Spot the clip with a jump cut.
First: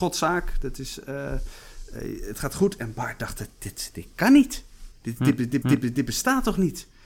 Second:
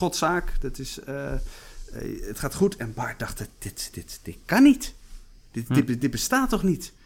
first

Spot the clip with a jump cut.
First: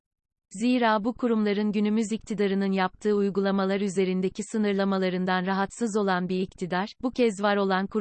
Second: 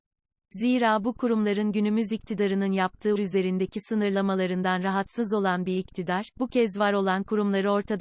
second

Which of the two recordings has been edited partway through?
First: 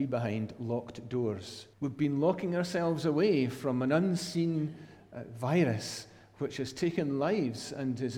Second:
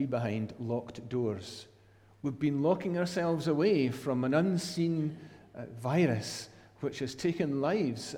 first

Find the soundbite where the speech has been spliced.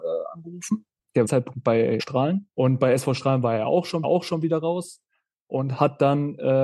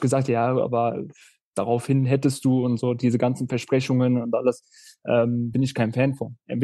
first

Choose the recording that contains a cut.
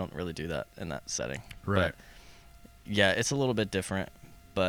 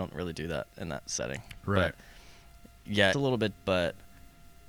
second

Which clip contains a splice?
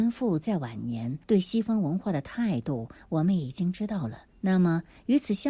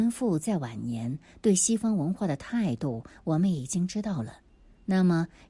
first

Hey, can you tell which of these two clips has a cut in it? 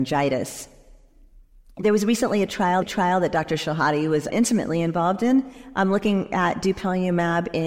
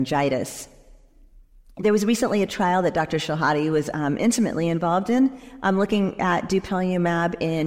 first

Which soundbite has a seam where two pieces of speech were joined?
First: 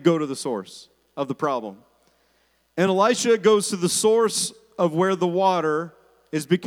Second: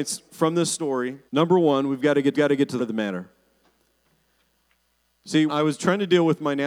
second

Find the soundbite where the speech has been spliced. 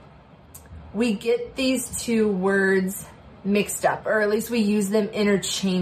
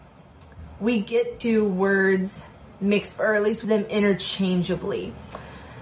second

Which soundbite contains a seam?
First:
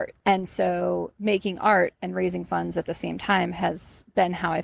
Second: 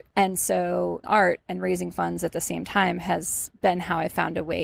second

